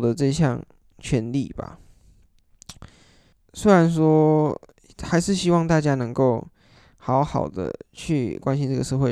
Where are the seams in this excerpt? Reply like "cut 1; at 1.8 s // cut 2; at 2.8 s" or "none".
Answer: cut 1; at 3.3 s